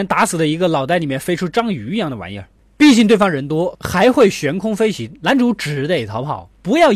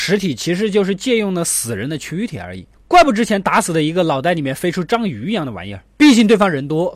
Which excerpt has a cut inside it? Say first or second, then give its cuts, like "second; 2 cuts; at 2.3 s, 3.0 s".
second; 1 cut; at 5.9 s